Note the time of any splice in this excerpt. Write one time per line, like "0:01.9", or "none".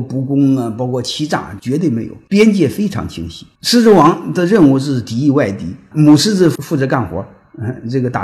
none